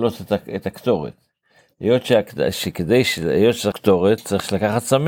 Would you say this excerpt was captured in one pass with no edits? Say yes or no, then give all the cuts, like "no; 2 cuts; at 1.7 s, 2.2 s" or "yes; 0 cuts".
no; 1 cut; at 3.7 s